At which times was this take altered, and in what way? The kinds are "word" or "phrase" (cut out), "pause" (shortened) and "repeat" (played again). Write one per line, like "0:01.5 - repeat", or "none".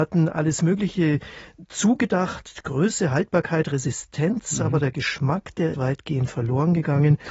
0:05.7 - word